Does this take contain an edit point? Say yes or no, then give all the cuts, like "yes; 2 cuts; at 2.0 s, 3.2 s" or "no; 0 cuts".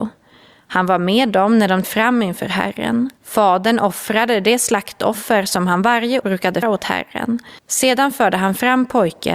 yes; 5 cuts; at 1.8 s, 3.2 s, 6.2 s, 6.6 s, 7.6 s